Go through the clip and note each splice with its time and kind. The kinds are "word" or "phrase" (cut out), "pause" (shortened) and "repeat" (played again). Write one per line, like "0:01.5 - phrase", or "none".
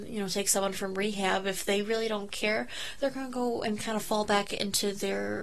none